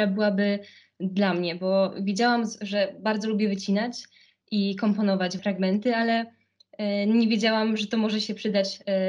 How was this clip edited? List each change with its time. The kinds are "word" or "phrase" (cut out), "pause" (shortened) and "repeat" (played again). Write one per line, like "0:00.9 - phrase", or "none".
0:05.4 - phrase